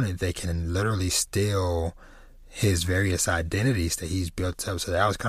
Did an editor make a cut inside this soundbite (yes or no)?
no